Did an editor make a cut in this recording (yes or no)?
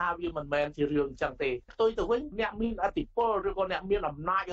yes